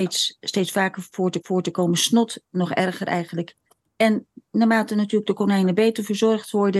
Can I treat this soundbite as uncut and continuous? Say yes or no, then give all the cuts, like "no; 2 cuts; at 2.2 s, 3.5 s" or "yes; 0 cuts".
no; 2 cuts; at 1.4 s, 3.7 s